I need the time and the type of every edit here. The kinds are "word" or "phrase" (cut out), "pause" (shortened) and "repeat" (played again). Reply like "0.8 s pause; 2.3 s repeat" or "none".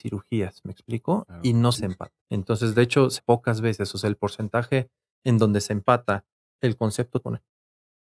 1.7 s word; 2.2 s pause; 3.2 s word; 7.2 s word